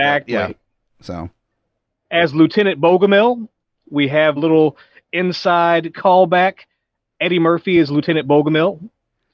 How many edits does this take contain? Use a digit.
1